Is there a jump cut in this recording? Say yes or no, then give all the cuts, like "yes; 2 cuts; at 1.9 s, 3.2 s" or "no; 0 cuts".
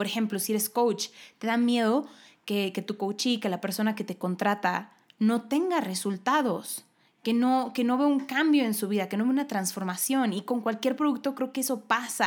no; 0 cuts